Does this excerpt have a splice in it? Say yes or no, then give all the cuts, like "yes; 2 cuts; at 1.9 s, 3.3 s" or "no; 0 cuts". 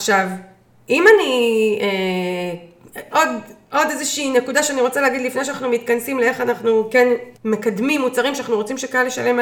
yes; 2 cuts; at 3.1 s, 7.4 s